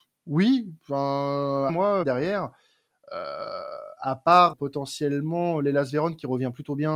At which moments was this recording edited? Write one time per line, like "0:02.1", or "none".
0:01.7
0:02.0
0:04.5